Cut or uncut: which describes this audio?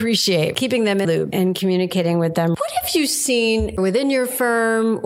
cut